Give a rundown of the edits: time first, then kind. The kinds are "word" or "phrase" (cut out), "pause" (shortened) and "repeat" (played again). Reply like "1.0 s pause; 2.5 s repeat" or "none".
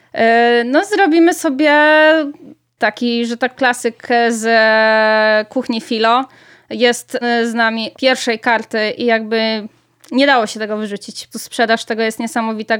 2.8 s word; 3.5 s word; 7.2 s word; 7.9 s word; 9.0 s word; 11.3 s word